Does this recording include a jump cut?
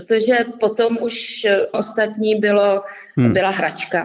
yes; 1 cut; at 1.7 s

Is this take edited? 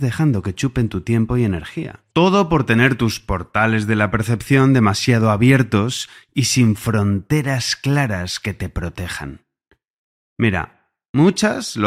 yes; 1 cut; at 2.1 s

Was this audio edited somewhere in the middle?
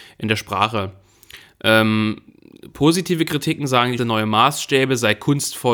yes; 1 cut; at 4.0 s

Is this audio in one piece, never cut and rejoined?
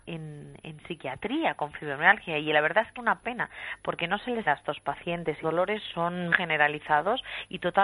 no; 5 cuts; at 2.9 s, 4.4 s, 5.4 s, 5.9 s, 6.3 s

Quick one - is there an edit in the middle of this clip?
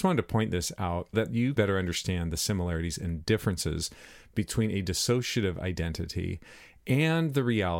yes; 2 cuts; at 1.1 s, 1.6 s

